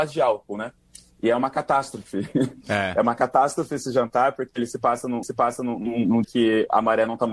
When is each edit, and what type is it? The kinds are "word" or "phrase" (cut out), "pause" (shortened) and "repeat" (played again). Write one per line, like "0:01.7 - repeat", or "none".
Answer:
0:05.2 - repeat
0:06.2 - word